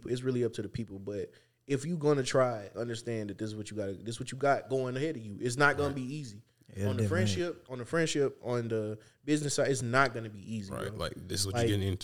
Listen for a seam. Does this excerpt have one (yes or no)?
yes